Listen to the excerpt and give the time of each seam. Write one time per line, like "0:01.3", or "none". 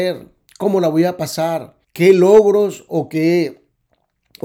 0:01.8